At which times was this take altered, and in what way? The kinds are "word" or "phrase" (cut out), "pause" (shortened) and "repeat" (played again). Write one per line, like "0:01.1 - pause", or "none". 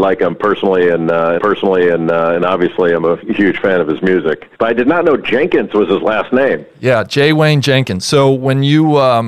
0:01.4 - repeat
0:04.5 - pause